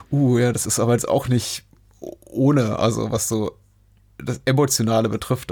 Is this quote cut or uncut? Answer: uncut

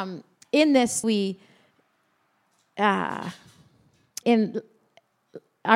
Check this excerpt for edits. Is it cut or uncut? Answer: cut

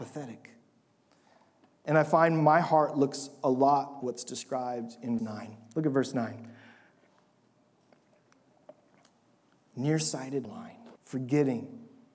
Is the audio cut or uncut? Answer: cut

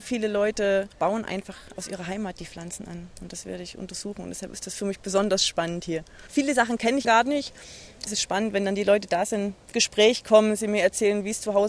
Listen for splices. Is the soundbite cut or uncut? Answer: cut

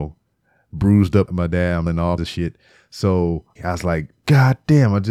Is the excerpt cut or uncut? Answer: cut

